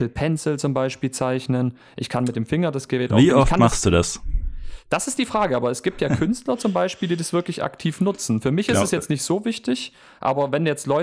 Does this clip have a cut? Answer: no; 0 cuts

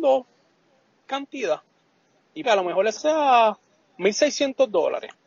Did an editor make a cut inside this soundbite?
yes; 3 cuts; at 1.1 s, 2.4 s, 3.0 s

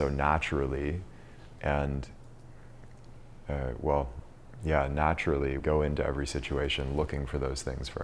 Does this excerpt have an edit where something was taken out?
yes; 2 cuts; at 1.6 s, 5.6 s

